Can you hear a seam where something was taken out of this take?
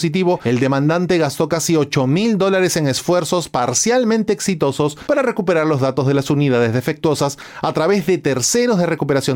no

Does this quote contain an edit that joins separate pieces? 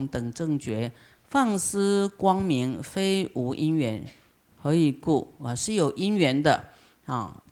no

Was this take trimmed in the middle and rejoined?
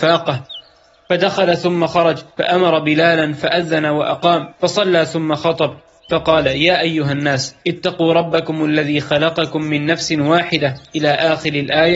yes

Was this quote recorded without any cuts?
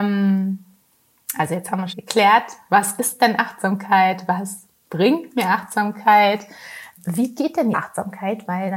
no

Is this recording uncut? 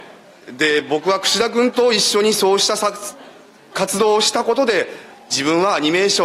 yes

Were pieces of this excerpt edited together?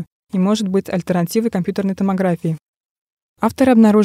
no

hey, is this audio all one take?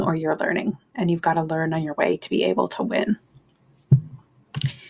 yes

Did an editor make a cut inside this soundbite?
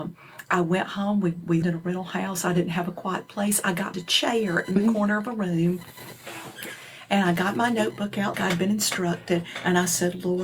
yes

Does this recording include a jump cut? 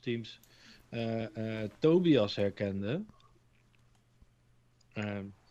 no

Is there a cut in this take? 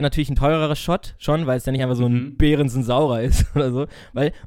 no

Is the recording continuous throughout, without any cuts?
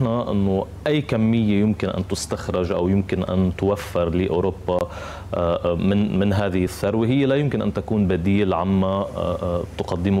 yes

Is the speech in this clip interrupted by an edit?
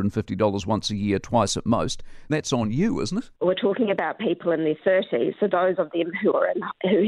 yes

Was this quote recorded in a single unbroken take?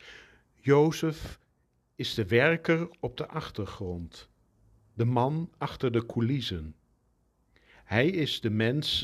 yes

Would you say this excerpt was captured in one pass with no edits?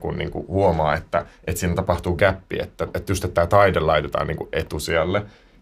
yes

